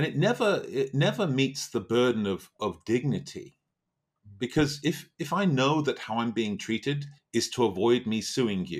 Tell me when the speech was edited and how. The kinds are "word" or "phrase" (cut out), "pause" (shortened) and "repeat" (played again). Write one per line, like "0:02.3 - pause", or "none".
0:07.2 - pause

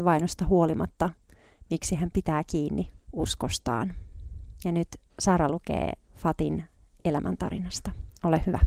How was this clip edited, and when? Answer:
0:03.0 - pause
0:05.1 - pause
0:06.0 - pause

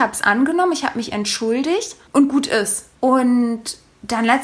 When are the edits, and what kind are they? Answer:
none

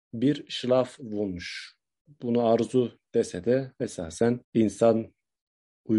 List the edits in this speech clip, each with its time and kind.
0:04.4 - pause

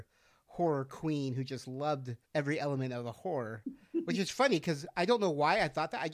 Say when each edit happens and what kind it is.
0:02.2 - pause

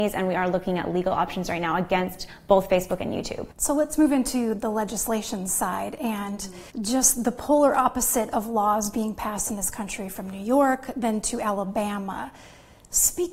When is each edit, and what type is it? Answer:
0:03.5 - pause
0:06.7 - pause

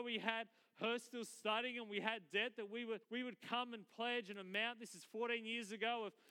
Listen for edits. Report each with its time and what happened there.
0:03.0 - pause

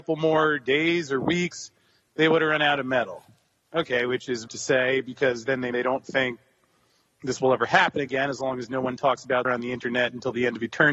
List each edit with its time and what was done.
0:03.6 - pause
0:04.5 - word
0:05.7 - word
0:09.4 - word

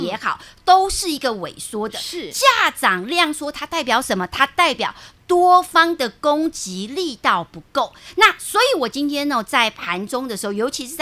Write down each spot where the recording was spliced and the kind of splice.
none

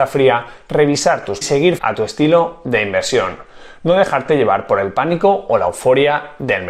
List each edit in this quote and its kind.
0:01.4 - phrase
0:01.8 - word

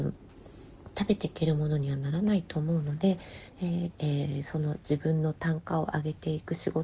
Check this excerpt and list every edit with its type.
0:03.9 - phrase

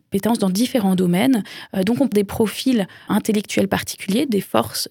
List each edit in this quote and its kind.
0:02.1 - word
0:03.1 - word

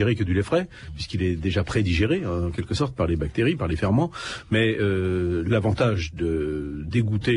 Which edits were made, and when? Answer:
none

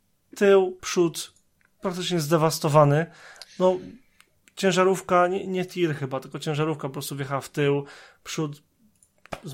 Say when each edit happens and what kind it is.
none

